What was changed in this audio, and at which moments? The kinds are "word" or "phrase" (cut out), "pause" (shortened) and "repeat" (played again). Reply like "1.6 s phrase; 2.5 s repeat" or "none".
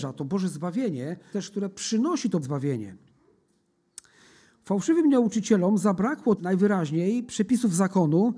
1.3 s word; 2.4 s word; 6.4 s word

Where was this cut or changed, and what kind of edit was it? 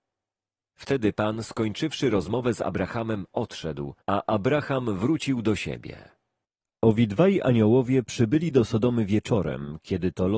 4.0 s pause; 6.4 s pause

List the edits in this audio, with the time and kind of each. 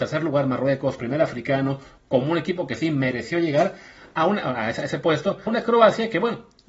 1.0 s word; 5.5 s word

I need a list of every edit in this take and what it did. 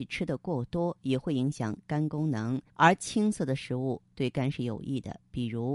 2.7 s pause

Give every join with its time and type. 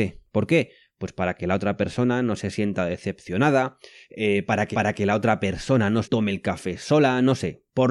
4.7 s repeat; 6.0 s word

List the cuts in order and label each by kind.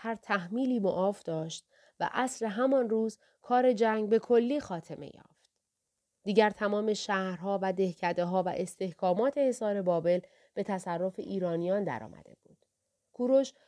none

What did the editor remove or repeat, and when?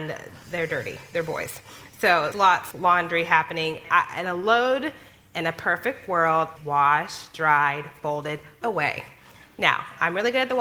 2.3 s word; 2.7 s word; 3.8 s word; 6.6 s word; 8.6 s word

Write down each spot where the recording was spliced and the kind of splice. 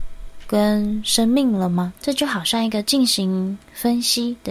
2.0 s pause

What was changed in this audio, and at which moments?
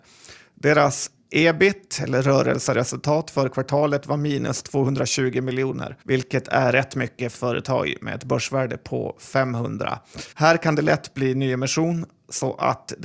6.0 s pause; 7.3 s phrase; 10.3 s pause

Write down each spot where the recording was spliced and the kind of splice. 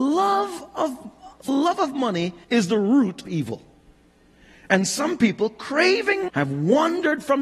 1.5 s word; 2.4 s pause; 3.3 s phrase; 6.3 s word

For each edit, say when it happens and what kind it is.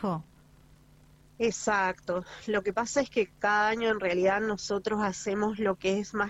none

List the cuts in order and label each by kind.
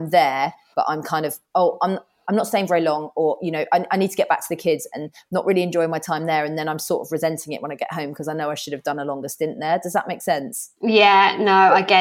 none

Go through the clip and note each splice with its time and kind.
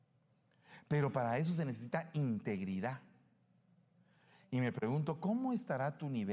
none

